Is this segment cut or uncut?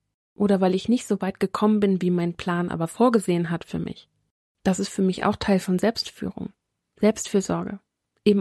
uncut